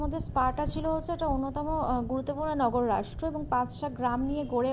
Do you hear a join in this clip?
no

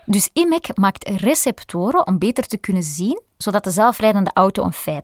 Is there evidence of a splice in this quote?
no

